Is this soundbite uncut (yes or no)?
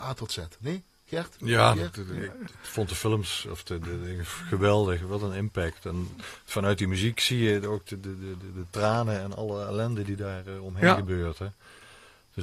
yes